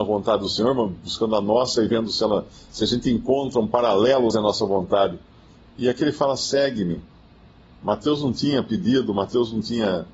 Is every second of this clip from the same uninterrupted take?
no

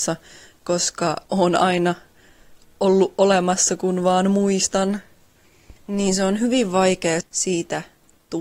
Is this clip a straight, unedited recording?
no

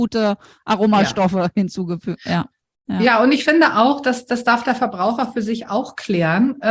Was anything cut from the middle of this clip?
no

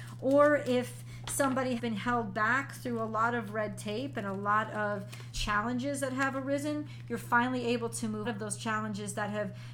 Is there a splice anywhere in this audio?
yes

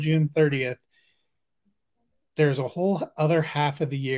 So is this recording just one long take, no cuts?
yes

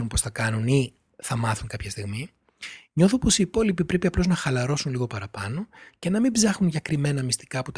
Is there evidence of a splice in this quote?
no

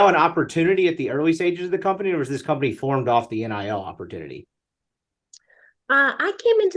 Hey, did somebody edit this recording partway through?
no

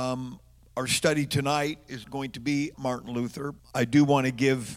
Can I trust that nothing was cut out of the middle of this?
no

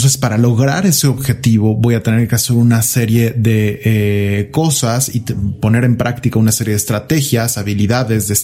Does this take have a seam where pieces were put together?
no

